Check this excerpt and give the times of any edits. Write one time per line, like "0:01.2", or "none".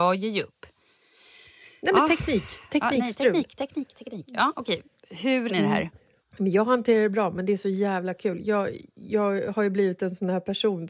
0:05.5
0:06.2